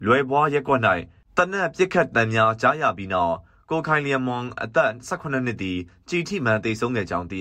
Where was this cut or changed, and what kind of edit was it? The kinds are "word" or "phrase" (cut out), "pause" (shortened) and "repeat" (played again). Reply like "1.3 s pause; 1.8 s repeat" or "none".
none